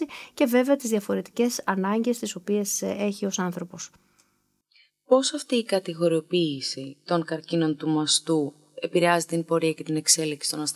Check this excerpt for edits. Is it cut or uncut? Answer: uncut